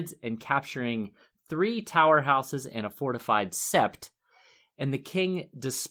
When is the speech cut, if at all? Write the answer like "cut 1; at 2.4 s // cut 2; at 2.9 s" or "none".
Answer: none